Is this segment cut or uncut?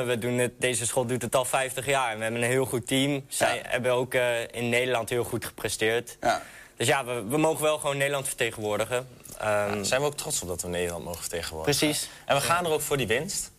uncut